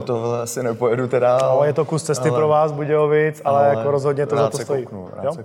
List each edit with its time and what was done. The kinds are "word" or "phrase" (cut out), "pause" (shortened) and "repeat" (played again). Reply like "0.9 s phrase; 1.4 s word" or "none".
none